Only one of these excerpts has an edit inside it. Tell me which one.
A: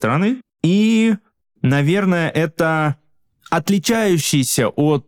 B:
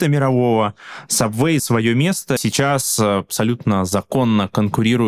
B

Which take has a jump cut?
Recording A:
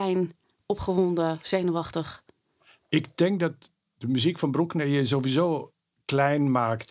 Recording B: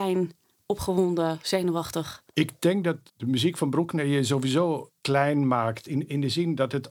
B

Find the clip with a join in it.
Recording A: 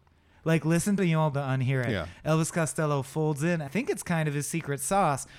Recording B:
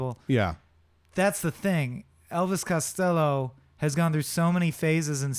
A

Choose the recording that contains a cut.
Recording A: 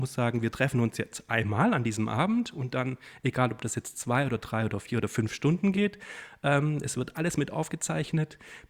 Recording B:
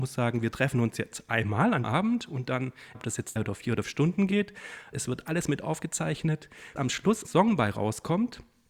B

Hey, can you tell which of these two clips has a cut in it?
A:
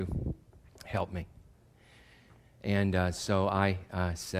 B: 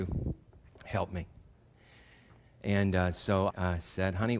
B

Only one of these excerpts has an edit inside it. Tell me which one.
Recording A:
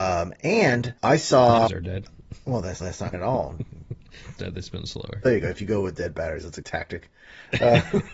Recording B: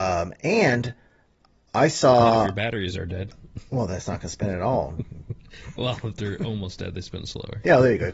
A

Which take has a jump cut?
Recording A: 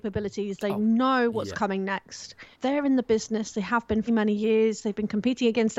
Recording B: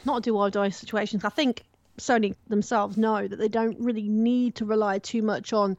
A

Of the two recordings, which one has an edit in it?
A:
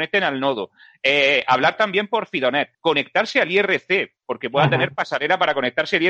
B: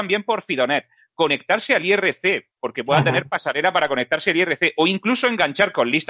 A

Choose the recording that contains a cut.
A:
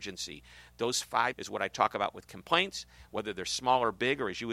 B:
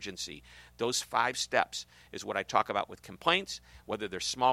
A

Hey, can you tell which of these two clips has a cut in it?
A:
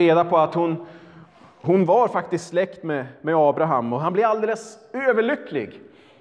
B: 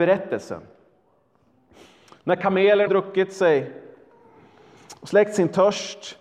B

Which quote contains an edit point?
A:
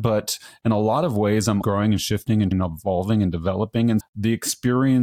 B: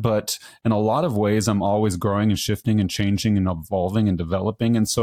A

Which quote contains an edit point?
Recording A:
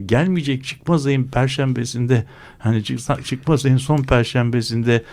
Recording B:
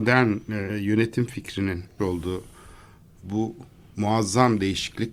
B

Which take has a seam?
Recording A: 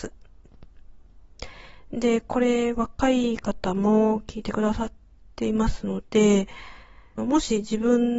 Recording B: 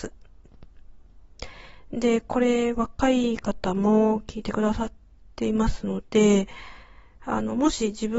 A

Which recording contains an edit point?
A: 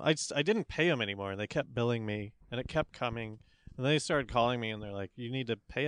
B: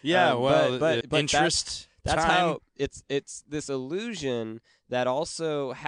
B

